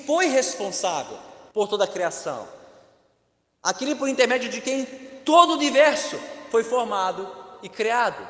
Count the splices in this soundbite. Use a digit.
1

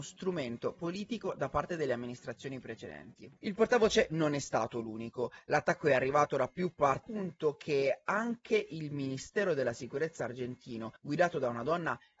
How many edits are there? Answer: 3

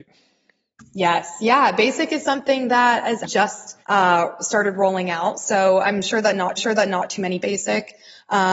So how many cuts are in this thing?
4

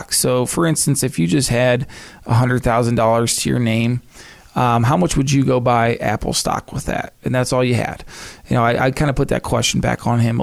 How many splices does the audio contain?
0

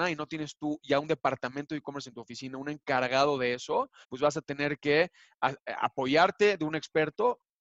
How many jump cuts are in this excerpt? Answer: 1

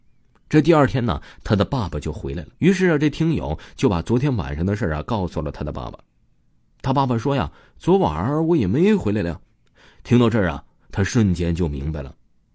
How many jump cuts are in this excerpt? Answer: 2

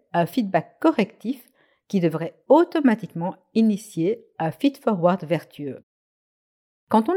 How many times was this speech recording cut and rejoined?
0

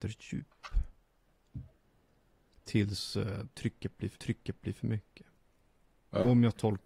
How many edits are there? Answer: 1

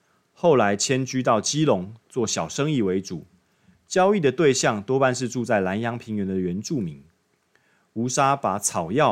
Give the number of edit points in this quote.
0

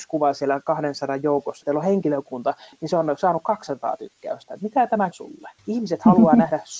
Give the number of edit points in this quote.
3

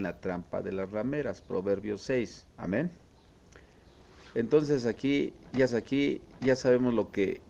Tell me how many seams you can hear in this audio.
2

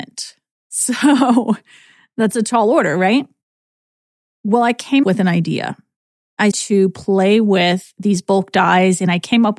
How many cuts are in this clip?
2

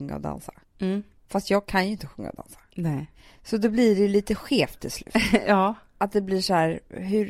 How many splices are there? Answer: 0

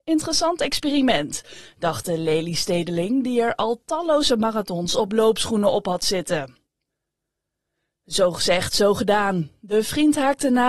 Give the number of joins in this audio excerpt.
0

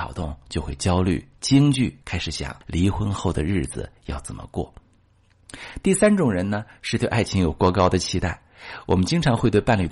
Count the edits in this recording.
2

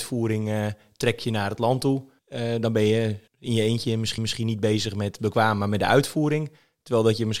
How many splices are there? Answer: 4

